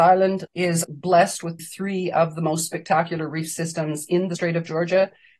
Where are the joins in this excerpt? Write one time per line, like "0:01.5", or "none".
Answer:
0:01.6